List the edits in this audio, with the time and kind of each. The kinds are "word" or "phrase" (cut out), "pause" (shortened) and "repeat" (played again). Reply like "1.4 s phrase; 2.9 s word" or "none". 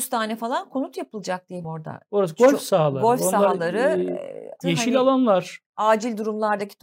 1.6 s word; 4.6 s word